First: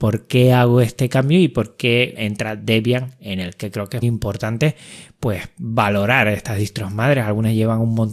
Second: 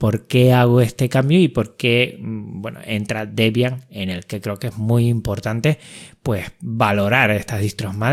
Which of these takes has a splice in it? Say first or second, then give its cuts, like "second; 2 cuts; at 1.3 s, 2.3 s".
first; 2 cuts; at 2.1 s, 4.0 s